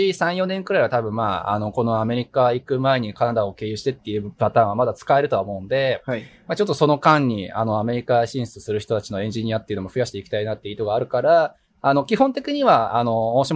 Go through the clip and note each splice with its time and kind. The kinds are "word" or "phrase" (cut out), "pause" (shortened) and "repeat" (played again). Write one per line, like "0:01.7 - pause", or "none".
none